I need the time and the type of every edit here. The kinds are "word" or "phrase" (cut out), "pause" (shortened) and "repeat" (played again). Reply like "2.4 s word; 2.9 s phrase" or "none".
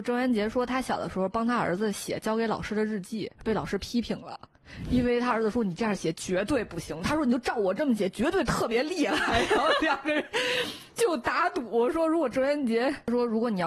3.3 s pause